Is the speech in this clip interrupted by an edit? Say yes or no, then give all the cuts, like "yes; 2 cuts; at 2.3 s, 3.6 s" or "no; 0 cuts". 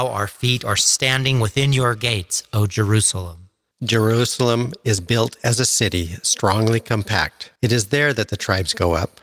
yes; 2 cuts; at 3.7 s, 7.6 s